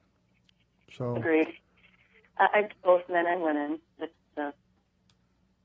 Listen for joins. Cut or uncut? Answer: cut